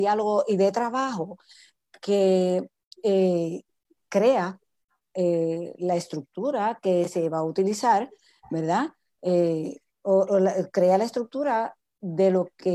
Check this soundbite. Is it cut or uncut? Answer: uncut